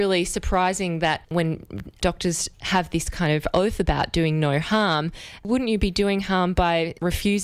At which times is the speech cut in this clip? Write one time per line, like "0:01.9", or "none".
0:02.5